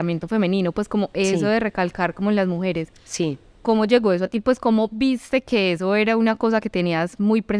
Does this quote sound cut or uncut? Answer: uncut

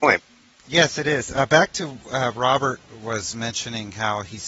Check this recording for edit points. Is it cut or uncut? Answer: uncut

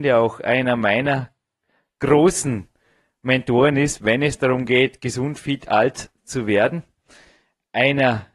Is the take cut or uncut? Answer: uncut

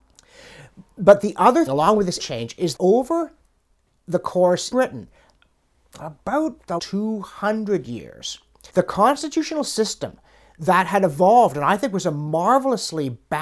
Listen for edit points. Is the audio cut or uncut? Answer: cut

